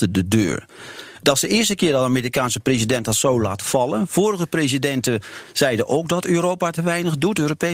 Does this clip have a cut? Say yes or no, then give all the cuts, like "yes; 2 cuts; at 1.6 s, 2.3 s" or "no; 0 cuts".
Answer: no; 0 cuts